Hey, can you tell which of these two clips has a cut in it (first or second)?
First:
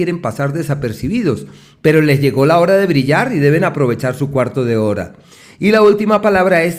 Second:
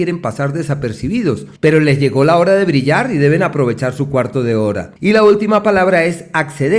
second